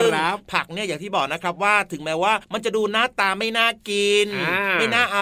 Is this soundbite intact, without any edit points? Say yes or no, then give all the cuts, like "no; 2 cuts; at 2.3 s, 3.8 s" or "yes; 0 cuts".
no; 1 cut; at 2.4 s